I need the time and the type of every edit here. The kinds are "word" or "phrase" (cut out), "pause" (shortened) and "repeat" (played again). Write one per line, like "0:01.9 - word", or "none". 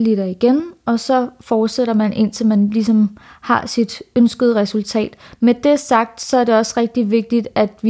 none